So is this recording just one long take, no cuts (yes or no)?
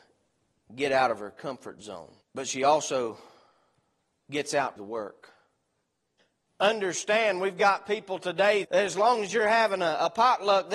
no